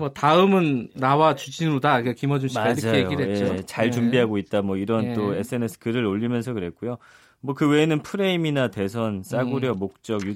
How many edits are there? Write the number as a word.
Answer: zero